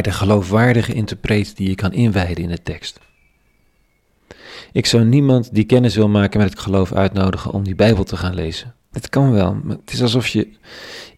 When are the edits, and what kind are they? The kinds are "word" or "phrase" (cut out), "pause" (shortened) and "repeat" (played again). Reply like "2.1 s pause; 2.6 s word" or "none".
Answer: 6.6 s word; 8.8 s pause